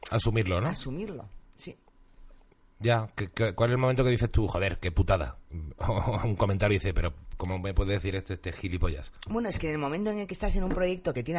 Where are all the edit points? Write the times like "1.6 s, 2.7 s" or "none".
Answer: none